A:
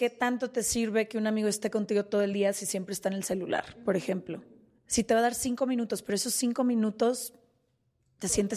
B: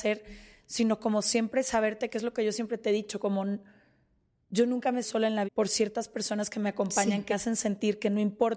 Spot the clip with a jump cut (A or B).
B